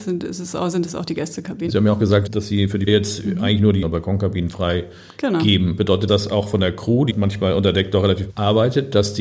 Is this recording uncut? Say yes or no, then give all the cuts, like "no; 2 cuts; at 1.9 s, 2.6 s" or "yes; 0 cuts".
no; 7 cuts; at 1.7 s, 2.3 s, 2.9 s, 3.8 s, 6.1 s, 7.1 s, 8.3 s